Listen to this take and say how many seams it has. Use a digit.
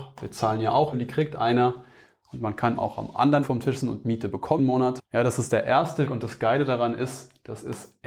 6